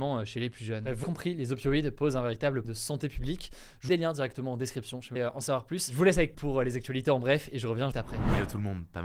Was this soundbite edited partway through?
yes; 6 cuts; at 1.0 s, 2.6 s, 3.9 s, 5.2 s, 6.3 s, 7.9 s

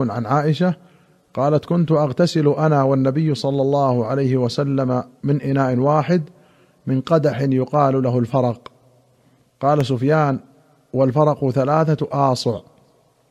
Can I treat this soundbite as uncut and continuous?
yes; 0 cuts

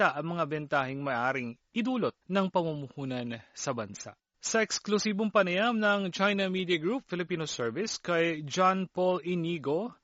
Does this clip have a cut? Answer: yes; 2 cuts; at 2.2 s, 4.3 s

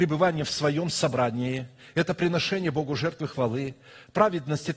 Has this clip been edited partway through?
no; 0 cuts

